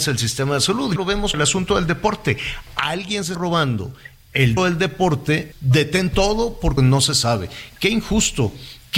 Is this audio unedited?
no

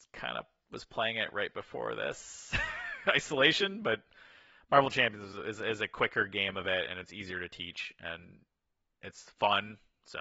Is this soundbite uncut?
yes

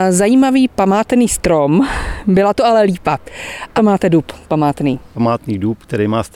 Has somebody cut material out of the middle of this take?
yes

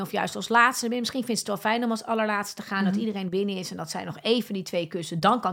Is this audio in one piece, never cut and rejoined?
yes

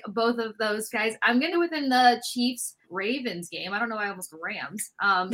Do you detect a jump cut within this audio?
yes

